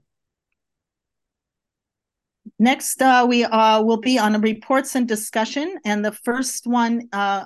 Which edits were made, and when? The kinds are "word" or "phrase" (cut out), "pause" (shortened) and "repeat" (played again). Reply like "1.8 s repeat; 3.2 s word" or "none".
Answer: none